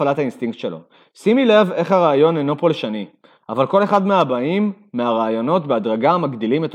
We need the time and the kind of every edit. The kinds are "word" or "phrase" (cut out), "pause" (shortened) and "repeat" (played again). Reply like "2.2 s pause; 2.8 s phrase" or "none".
none